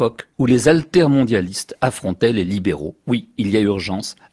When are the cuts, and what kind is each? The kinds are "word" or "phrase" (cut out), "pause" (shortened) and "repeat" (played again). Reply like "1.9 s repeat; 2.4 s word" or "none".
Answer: none